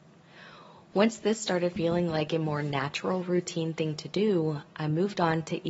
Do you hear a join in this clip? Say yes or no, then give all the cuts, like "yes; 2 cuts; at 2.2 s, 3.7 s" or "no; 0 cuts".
no; 0 cuts